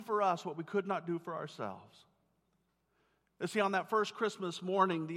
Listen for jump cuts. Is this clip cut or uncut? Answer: uncut